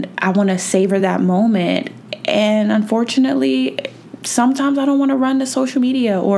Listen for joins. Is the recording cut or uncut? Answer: uncut